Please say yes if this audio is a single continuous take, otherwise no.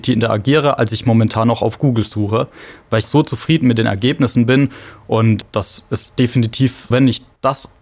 no